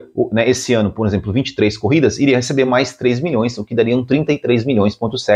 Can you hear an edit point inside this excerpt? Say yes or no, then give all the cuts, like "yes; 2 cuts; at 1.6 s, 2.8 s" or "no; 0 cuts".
no; 0 cuts